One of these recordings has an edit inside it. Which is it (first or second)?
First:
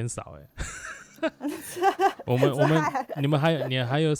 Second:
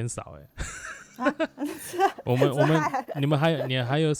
first